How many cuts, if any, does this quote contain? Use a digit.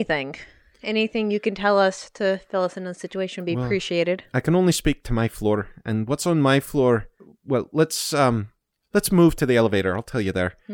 0